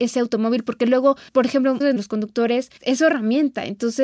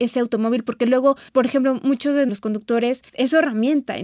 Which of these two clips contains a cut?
first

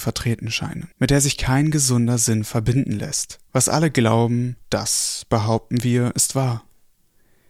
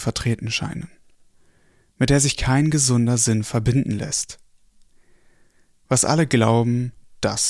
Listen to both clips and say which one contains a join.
first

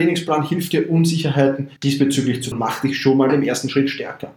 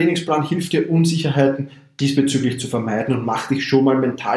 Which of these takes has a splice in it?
first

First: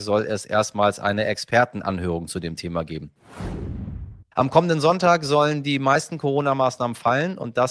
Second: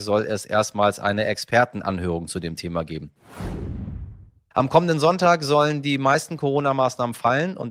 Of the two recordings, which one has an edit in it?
first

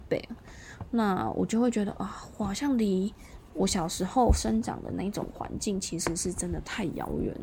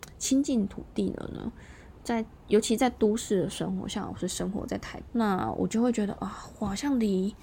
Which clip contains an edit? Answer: second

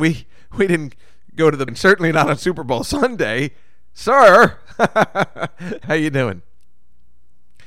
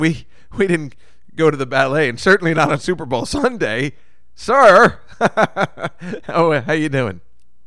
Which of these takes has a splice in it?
first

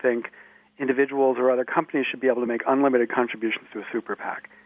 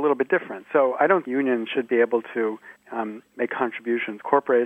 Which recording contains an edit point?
second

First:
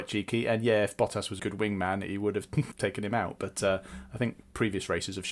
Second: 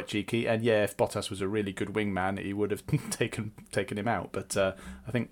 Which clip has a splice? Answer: first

